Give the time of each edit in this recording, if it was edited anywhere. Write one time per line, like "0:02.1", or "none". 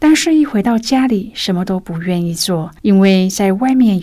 0:02.8